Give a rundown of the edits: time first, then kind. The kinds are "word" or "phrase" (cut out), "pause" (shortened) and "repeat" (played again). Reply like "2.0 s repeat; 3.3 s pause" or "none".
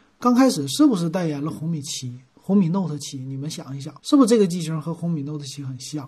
4.0 s pause